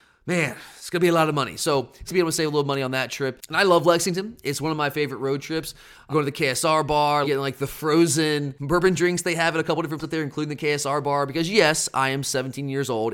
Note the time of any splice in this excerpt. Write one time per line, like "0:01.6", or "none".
0:02.1
0:06.1
0:07.2
0:10.0

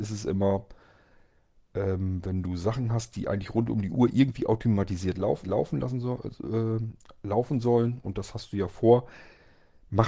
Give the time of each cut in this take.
0:05.4

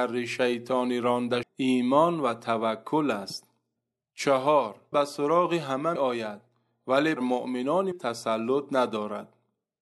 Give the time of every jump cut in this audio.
0:01.4
0:04.9
0:06.0
0:07.2
0:07.9

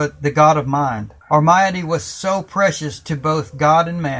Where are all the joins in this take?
0:01.2

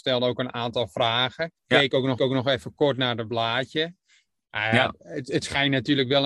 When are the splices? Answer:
0:01.6
0:02.2

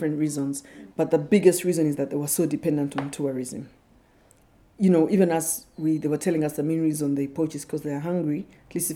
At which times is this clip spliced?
0:00.9

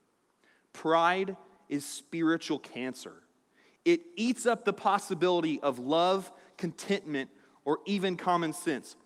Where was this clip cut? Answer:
none

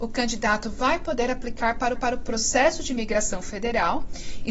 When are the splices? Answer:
0:01.9

